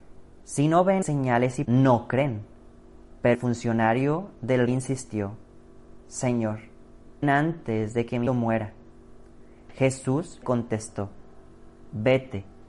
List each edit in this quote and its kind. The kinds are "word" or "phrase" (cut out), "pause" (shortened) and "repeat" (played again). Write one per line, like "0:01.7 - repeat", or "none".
0:01.0 - word
0:01.6 - word
0:03.3 - word
0:04.7 - word
0:07.2 - word
0:08.3 - word
0:10.4 - word